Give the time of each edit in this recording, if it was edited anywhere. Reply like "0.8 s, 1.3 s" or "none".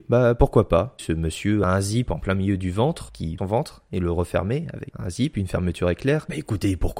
1.0 s, 3.4 s, 4.9 s